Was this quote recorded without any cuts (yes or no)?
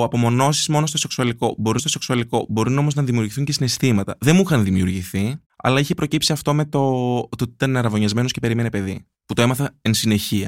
no